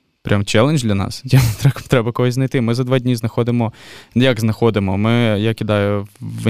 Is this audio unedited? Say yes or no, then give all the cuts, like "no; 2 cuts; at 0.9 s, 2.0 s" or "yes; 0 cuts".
yes; 0 cuts